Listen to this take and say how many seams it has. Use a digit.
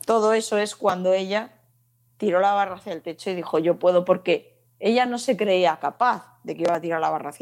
0